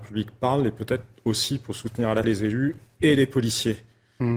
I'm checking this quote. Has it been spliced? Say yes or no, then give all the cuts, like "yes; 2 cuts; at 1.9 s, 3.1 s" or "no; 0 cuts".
yes; 1 cut; at 2.2 s